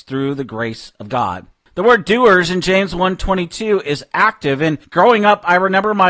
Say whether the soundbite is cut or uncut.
cut